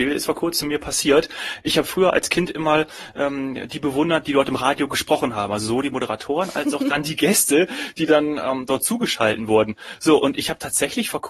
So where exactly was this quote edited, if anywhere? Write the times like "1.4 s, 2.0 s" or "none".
none